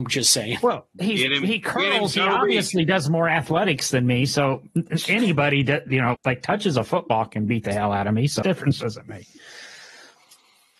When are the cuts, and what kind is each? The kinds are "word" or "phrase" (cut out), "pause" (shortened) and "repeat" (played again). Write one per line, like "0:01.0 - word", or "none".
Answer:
0:06.1 - word
0:08.4 - word